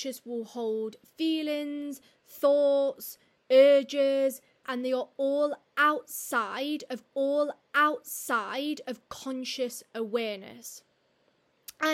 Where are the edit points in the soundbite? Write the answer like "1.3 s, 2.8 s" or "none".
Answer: 4.6 s, 7.1 s

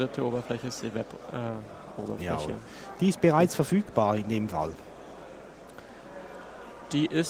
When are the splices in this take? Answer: none

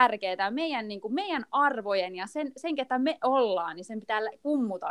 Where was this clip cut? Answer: none

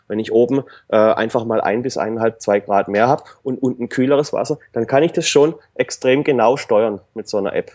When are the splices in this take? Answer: none

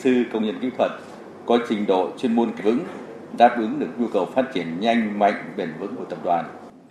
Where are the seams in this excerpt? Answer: 2.6 s

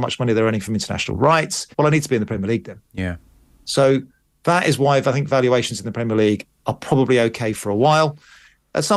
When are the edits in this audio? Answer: 1.7 s, 2.8 s, 6.6 s

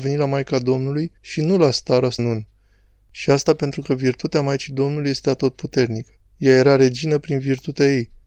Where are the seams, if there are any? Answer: 1.2 s, 2.2 s, 6.3 s

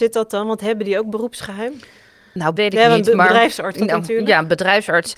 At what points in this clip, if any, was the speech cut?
2.6 s, 3.7 s

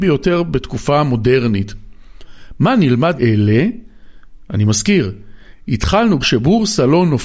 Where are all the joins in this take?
3.2 s, 6.2 s

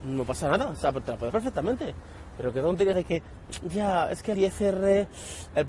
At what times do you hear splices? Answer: 1.3 s, 2.9 s, 4.3 s

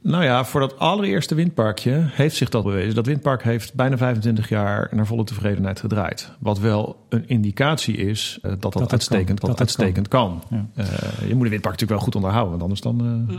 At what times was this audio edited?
2.6 s, 8.4 s, 9.4 s

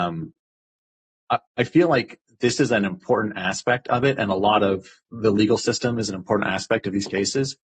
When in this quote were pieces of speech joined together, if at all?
1.5 s

